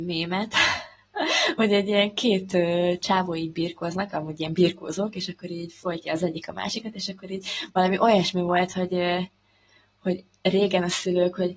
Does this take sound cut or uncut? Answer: uncut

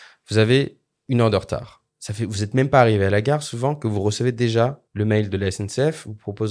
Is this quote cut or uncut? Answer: cut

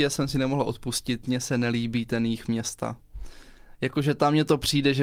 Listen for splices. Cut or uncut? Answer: uncut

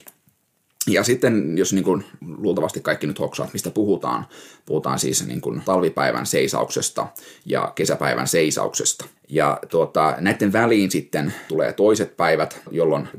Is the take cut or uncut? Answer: cut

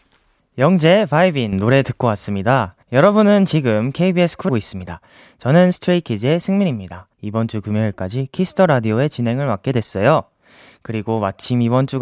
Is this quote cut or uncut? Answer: cut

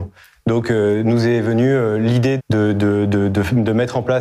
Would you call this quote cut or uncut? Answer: cut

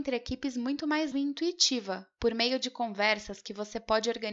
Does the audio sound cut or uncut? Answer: cut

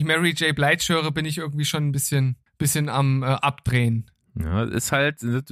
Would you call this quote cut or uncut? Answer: cut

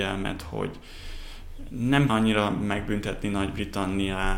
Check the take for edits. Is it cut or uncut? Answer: cut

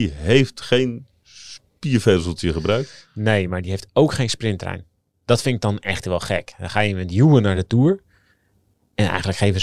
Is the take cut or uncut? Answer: uncut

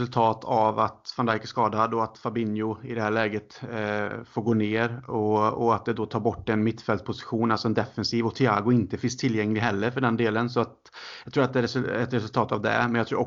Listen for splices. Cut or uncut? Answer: uncut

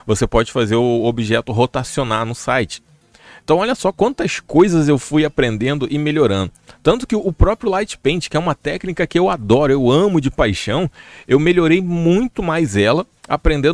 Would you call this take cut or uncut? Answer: uncut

